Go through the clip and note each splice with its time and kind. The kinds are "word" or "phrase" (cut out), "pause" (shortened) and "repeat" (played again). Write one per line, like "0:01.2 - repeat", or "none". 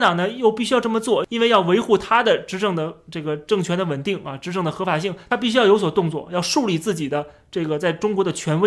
none